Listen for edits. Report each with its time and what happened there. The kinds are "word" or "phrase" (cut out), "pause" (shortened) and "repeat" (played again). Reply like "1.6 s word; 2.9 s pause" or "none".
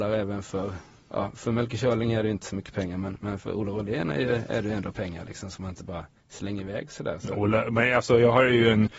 6.2 s pause